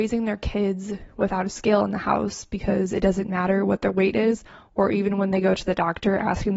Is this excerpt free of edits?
yes; 0 cuts

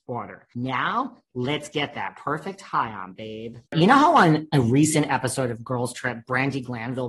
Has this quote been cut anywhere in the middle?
yes; 1 cut; at 3.7 s

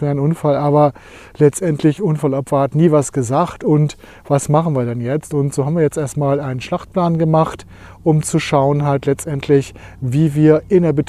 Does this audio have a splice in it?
no; 0 cuts

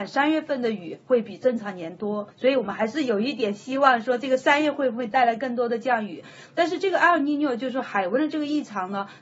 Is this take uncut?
no; 1 cut; at 2.3 s

